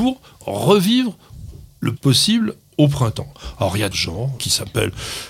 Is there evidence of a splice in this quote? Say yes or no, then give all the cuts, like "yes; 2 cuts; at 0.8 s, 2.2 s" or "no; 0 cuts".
yes; 3 cuts; at 2.0 s, 3.9 s, 4.4 s